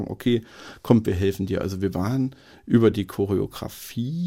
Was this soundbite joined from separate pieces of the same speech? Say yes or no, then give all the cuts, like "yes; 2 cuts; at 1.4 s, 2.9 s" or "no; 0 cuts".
no; 0 cuts